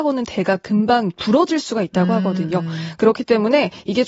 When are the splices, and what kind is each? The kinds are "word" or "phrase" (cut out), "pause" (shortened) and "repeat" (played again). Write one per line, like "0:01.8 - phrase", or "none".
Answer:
none